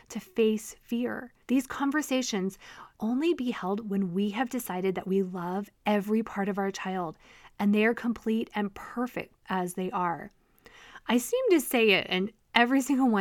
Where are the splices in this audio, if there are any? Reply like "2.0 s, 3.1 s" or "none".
1.4 s, 3.0 s, 5.7 s, 9.4 s